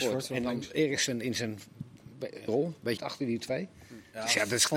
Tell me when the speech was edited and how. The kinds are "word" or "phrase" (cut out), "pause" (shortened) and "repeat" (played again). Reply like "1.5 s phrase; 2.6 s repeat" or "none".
2.5 s word; 3.0 s word